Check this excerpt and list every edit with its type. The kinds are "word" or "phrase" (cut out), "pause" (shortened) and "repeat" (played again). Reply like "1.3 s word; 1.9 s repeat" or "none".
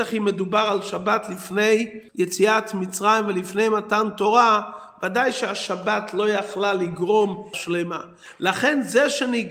2.1 s pause; 7.5 s word

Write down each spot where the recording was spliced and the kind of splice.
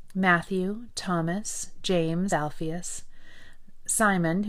2.3 s phrase

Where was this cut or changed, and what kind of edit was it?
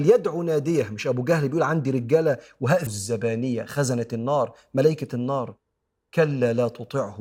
2.9 s phrase

